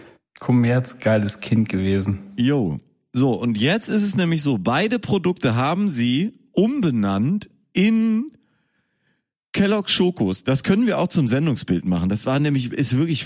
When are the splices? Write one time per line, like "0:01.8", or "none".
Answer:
none